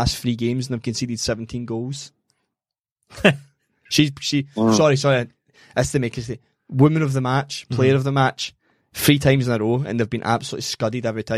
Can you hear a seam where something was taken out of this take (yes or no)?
no